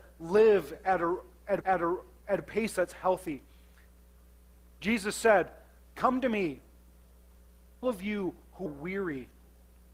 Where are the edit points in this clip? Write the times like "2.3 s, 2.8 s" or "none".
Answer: 1.6 s, 7.8 s, 8.7 s